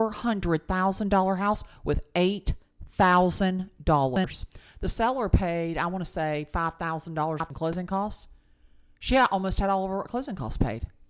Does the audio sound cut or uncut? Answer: uncut